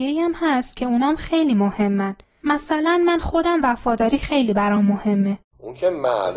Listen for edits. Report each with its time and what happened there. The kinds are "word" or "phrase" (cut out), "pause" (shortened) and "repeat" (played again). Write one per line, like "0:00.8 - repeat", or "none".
none